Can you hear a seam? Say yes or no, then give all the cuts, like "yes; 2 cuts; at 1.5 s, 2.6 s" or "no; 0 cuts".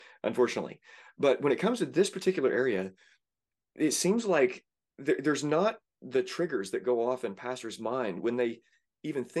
no; 0 cuts